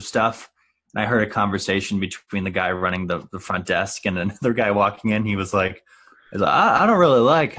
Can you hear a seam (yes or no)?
no